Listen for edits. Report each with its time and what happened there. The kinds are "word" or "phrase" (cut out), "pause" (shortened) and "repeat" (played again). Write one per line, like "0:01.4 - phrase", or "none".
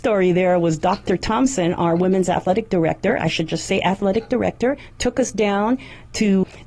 none